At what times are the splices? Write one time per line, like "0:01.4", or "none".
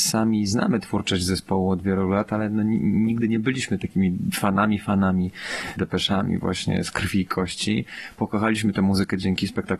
none